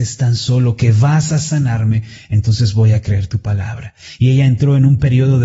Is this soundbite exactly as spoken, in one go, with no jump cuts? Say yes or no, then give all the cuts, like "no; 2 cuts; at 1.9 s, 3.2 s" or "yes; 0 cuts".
yes; 0 cuts